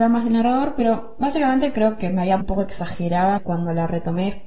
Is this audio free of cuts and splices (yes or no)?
no